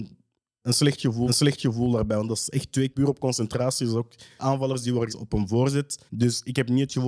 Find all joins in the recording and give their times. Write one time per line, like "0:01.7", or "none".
0:01.3
0:02.9
0:04.4
0:05.1
0:06.1